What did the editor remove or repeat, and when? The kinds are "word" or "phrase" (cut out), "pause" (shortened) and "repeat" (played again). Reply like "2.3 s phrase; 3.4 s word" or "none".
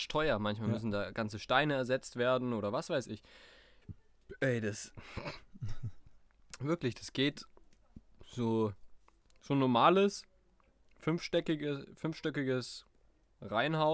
none